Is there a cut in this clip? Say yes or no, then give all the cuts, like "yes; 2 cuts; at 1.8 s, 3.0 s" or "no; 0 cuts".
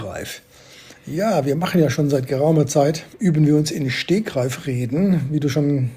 yes; 1 cut; at 3.1 s